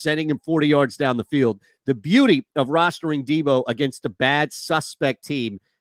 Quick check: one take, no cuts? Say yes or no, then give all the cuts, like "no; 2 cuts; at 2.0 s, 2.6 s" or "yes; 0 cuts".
yes; 0 cuts